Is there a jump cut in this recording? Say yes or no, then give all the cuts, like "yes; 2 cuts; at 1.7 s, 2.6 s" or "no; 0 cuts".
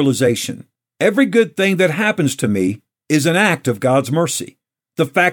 no; 0 cuts